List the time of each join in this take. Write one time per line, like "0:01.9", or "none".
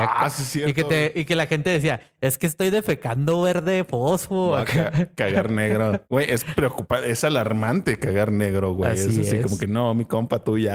0:06.1